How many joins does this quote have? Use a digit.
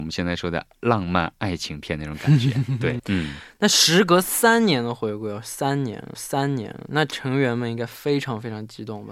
2